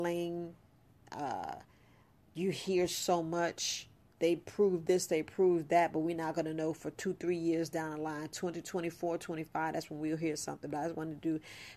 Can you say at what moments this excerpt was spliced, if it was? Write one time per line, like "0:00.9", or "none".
none